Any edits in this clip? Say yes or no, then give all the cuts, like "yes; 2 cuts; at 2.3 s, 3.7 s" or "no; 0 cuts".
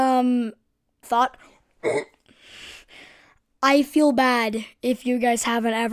yes; 2 cuts; at 1.0 s, 3.6 s